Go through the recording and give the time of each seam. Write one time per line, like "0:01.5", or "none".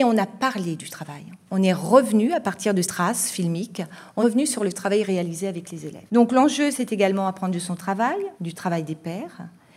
0:02.8
0:04.2
0:06.1
0:08.3